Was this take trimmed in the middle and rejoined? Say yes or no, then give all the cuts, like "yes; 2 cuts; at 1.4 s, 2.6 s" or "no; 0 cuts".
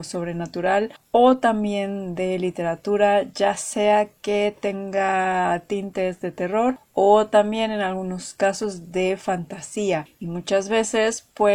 no; 0 cuts